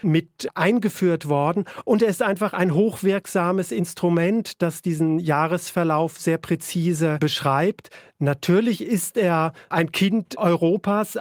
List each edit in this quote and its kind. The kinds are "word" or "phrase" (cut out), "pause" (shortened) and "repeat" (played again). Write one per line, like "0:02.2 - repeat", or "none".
none